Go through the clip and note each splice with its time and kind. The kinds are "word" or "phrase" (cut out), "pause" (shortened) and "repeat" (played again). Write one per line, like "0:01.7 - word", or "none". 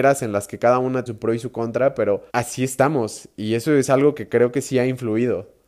0:01.1 - word
0:02.3 - pause